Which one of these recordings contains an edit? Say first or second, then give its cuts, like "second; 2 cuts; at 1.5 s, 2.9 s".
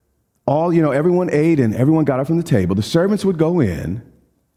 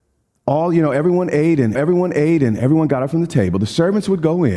second; 1 cut; at 1.7 s